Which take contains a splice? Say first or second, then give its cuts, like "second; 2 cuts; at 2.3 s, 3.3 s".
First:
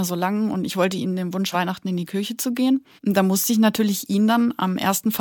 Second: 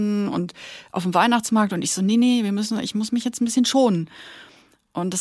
first; 2 cuts; at 1.5 s, 3.0 s